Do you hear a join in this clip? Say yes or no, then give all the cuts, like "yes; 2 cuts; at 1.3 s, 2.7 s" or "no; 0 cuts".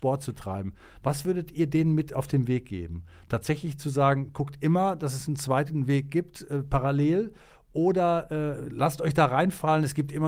no; 0 cuts